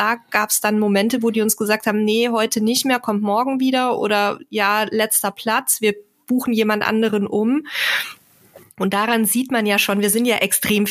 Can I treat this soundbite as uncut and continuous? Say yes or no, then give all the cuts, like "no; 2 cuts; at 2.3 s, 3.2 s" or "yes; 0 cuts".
yes; 0 cuts